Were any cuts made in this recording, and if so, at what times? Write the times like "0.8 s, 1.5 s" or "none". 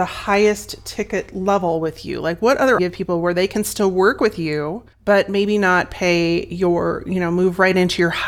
2.8 s, 4.9 s